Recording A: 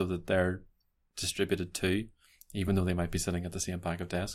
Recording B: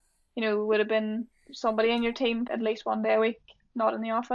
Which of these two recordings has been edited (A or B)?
B